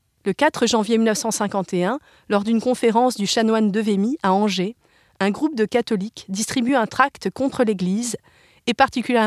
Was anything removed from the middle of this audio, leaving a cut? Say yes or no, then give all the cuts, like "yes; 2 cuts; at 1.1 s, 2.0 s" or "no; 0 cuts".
no; 0 cuts